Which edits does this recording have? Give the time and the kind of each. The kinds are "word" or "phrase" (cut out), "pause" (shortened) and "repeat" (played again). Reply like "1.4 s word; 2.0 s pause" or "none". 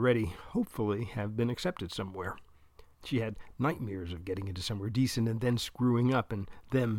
2.9 s pause